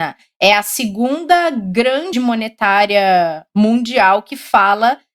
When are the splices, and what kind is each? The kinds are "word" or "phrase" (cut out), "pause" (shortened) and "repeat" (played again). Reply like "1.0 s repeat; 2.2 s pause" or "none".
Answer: 2.1 s word